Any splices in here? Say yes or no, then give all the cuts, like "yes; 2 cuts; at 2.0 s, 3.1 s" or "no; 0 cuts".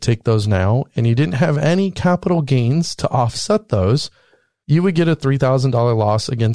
no; 0 cuts